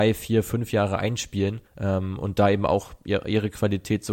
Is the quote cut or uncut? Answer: cut